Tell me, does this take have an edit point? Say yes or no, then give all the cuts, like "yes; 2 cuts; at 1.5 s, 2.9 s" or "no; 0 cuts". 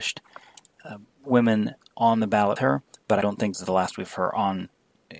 yes; 4 cuts; at 2.6 s, 3.2 s, 3.5 s, 4.1 s